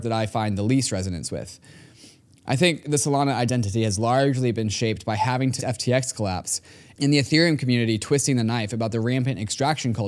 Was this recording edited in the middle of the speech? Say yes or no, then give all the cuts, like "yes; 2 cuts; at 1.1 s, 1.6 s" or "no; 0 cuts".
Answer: yes; 1 cut; at 5.6 s